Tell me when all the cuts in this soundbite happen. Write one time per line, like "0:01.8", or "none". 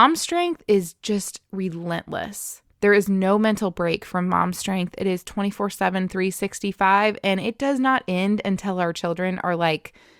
0:02.7

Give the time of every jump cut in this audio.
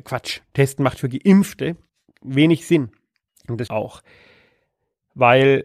0:01.9
0:03.3
0:03.7

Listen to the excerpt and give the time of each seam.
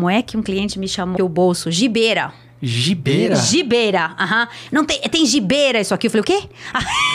0:01.2

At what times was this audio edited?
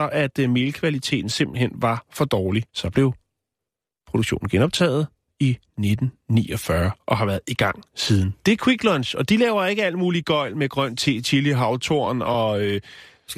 0:02.7

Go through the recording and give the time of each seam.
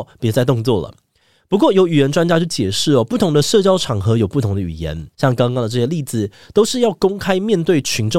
0:05.1

